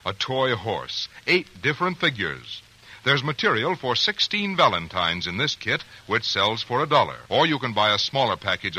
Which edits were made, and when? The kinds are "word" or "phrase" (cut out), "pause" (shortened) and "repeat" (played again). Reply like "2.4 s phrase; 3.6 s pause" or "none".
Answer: 7.3 s pause

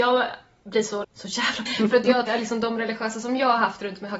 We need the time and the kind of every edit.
1.0 s word; 1.7 s word; 2.3 s word

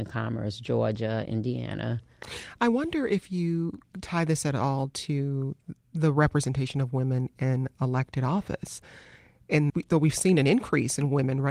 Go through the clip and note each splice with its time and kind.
5.8 s pause; 9.7 s word

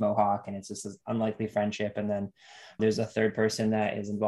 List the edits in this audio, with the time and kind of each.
2.8 s word

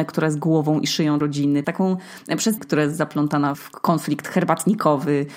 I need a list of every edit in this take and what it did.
1.2 s word; 1.6 s word; 2.6 s word; 3.5 s word

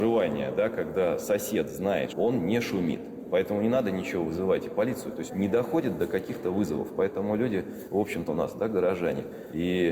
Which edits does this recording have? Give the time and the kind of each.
2.1 s phrase; 5.3 s word; 8.3 s word

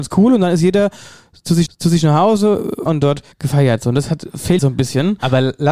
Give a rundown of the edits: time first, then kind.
1.7 s repeat; 2.9 s word; 3.3 s pause; 4.6 s word

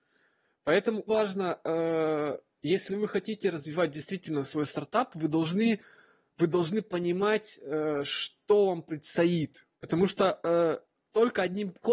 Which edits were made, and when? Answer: 1.1 s word; 9.7 s pause

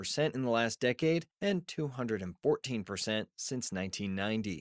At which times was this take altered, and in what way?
1.3 s pause

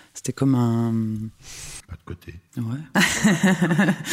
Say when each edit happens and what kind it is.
2.5 s pause

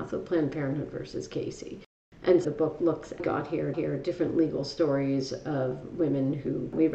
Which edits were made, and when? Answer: 2.4 s word; 3.2 s phrase; 3.7 s repeat

